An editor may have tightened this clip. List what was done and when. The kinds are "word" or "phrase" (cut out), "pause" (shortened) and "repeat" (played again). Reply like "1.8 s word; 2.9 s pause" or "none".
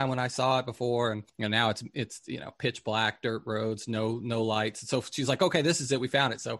1.3 s pause